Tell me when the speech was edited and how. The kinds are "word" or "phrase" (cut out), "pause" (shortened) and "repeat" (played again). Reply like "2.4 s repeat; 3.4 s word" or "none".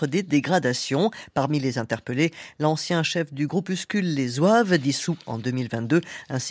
none